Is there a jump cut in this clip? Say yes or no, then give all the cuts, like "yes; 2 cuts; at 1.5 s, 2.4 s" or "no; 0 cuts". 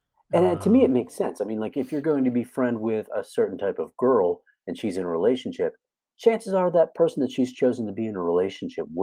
no; 0 cuts